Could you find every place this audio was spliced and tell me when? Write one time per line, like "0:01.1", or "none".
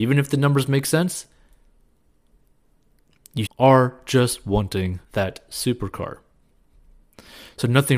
0:03.5
0:05.0